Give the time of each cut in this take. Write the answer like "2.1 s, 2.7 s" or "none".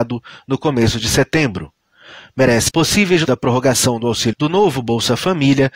2.7 s, 3.2 s, 4.3 s